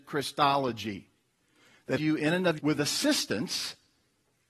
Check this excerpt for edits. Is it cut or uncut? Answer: cut